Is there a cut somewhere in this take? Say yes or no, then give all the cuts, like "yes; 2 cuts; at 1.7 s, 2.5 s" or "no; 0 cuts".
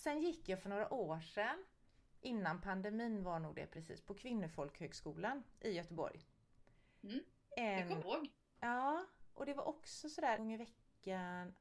yes; 2 cuts; at 8.0 s, 10.4 s